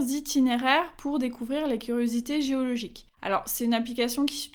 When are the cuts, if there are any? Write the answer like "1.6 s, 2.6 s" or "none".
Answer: 3.1 s, 3.6 s